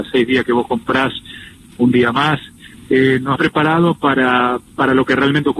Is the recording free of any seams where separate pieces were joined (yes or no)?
no